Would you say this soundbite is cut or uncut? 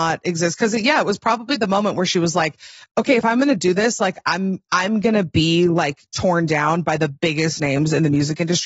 uncut